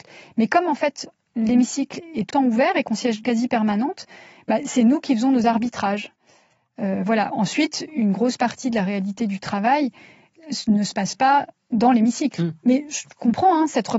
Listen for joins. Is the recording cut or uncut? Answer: cut